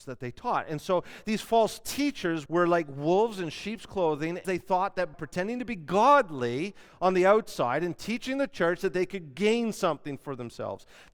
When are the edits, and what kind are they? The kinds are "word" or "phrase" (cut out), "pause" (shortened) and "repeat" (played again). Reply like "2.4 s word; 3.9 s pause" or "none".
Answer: 2.5 s word; 4.4 s word; 5.1 s word